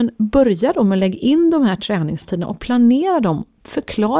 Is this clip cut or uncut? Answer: uncut